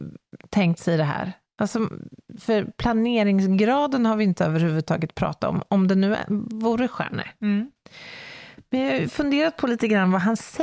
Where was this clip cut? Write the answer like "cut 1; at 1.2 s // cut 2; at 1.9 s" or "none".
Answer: none